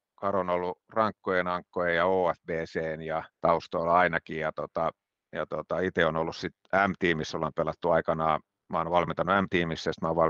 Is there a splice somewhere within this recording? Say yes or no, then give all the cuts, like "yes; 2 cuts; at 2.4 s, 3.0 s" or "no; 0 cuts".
yes; 3 cuts; at 3.3 s, 6.6 s, 8.6 s